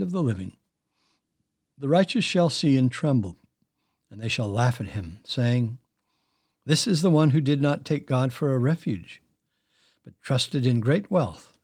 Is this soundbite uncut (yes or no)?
yes